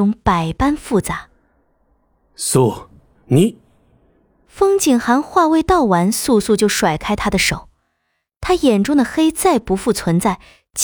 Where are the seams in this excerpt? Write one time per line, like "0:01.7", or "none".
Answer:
none